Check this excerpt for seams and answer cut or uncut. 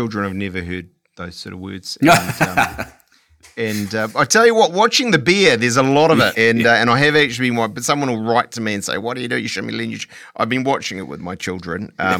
cut